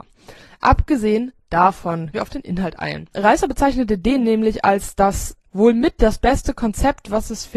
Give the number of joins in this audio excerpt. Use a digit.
1